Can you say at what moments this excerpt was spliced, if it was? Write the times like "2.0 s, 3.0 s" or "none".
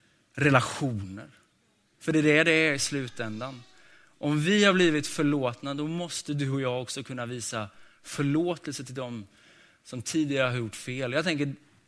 none